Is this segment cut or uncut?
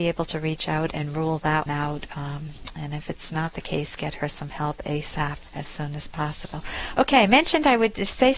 cut